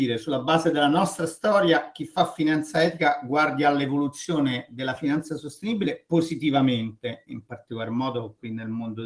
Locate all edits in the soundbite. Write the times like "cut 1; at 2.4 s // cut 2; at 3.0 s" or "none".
none